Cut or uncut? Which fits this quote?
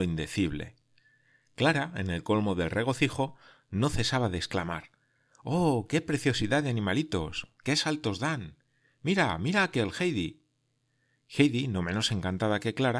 uncut